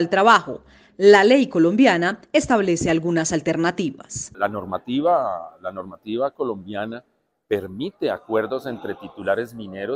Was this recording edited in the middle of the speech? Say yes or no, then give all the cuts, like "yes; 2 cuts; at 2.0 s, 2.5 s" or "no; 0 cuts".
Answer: no; 0 cuts